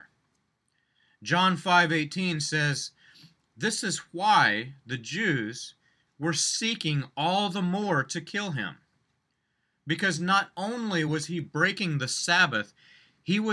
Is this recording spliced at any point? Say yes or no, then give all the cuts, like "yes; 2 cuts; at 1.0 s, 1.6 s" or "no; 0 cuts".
no; 0 cuts